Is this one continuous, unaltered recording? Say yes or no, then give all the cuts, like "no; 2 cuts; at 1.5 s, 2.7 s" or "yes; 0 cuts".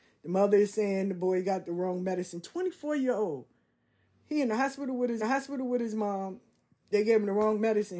no; 1 cut; at 5.2 s